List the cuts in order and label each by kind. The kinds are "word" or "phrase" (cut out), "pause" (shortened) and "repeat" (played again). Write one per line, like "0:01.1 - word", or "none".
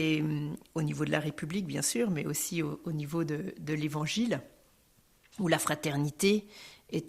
none